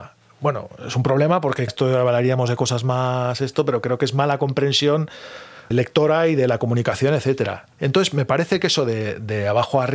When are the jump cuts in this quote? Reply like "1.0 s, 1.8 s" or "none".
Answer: 1.7 s, 5.7 s